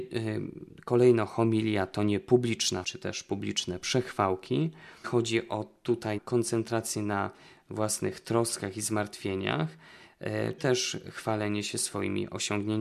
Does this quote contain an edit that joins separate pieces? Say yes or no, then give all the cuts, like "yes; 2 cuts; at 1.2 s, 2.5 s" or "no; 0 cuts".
yes; 4 cuts; at 2.8 s, 5.0 s, 6.2 s, 10.6 s